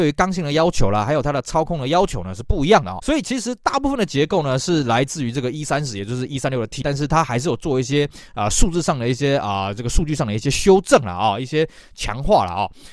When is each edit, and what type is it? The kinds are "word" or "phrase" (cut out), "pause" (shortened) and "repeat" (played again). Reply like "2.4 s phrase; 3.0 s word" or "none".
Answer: 3.0 s word; 6.8 s word